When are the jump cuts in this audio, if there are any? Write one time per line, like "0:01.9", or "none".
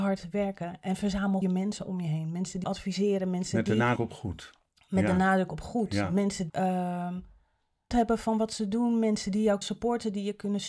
0:01.4
0:02.6
0:04.0
0:06.5
0:07.9
0:09.6